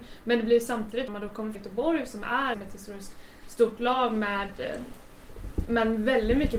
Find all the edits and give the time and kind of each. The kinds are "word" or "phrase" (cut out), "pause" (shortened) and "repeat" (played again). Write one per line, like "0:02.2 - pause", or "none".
0:01.1 - phrase
0:01.5 - word
0:02.5 - word